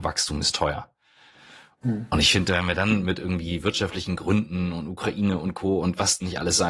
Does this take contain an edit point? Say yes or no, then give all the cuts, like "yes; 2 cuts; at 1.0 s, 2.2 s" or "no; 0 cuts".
no; 0 cuts